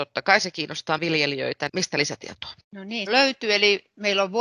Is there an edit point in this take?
yes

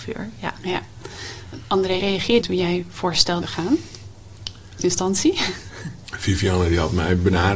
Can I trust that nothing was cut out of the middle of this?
no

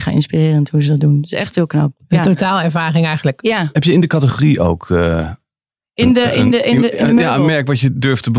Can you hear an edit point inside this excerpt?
no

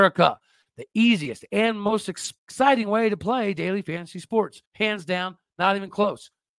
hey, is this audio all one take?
no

